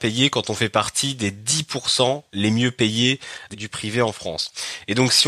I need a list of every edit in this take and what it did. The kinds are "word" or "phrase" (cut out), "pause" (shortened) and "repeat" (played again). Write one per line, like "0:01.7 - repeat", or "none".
0:03.5 - word